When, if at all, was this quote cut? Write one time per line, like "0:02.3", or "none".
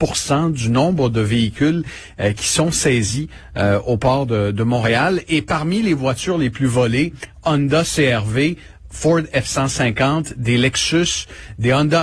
none